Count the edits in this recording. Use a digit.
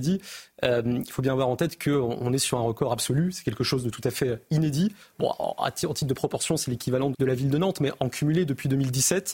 1